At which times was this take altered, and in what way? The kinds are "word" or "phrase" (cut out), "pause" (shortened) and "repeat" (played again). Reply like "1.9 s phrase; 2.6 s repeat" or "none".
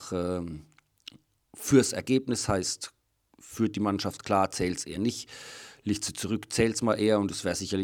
none